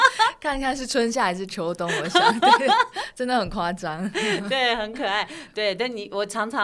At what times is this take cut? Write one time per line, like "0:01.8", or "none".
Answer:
none